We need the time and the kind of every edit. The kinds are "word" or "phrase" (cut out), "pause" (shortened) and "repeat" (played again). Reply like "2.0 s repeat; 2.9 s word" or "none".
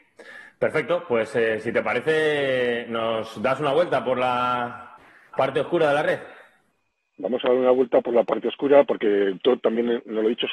none